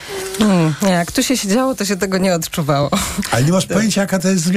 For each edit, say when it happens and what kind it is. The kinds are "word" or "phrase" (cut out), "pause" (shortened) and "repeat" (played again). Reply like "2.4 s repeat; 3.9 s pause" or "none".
none

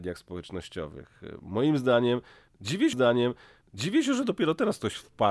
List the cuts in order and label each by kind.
2.9 s repeat

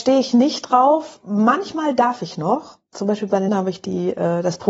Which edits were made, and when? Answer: 3.5 s word

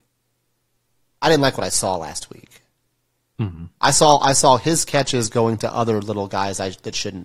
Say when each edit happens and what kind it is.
none

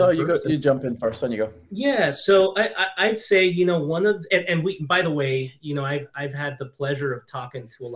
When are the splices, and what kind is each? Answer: 1.7 s pause

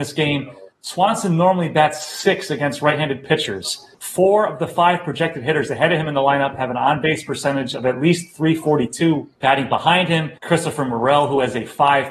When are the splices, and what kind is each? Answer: 3.9 s pause; 9.4 s pause; 10.4 s pause

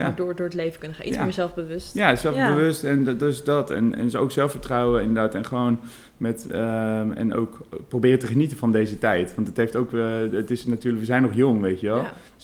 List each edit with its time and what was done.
none

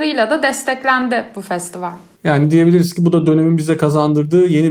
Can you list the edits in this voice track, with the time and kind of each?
none

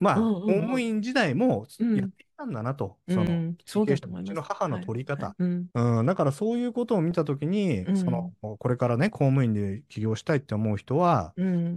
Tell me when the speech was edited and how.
none

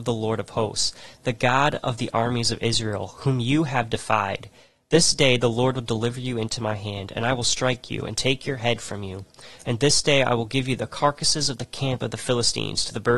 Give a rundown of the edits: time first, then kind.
none

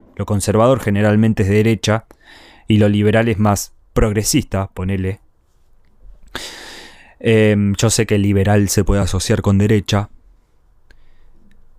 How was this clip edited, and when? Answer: none

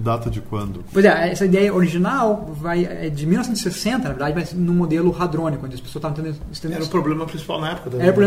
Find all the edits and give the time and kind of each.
none

